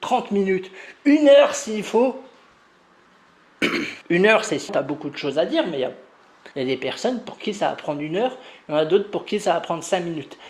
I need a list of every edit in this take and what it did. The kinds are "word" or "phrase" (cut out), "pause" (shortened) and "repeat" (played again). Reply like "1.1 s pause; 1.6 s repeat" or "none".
4.0 s pause; 4.7 s word; 6.5 s pause